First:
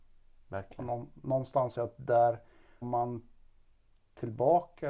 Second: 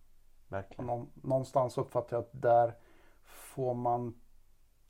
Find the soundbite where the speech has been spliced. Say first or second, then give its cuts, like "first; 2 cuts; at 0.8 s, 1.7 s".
first; 2 cuts; at 1.7 s, 2.8 s